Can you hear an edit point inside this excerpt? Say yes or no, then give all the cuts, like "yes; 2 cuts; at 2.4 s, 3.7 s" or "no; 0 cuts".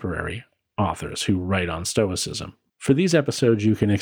yes; 1 cut; at 2.7 s